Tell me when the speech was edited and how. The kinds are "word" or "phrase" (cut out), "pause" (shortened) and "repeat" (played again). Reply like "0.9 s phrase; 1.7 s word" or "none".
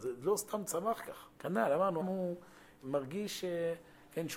1.3 s pause; 2.0 s word; 2.8 s word